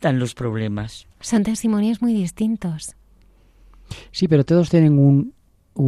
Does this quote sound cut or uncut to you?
cut